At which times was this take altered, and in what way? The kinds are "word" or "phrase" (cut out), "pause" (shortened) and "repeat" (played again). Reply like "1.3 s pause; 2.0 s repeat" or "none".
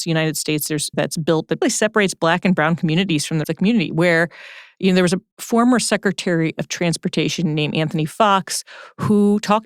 0.9 s word; 1.6 s word; 3.4 s word